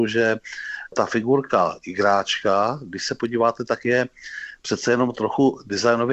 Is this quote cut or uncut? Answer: uncut